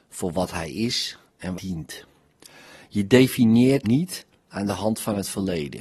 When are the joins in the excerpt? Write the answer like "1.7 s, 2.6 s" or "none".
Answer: 1.5 s, 3.8 s